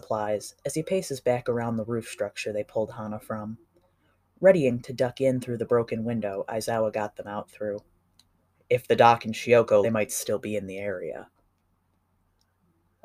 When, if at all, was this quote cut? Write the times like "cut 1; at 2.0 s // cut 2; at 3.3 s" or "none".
cut 1; at 8.2 s // cut 2; at 9.8 s